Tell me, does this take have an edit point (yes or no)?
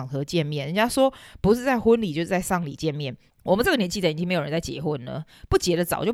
yes